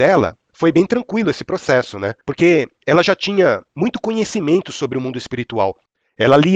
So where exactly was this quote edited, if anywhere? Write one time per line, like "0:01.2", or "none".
0:02.2